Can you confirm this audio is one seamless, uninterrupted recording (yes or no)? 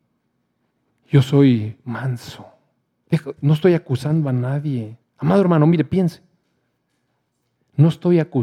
no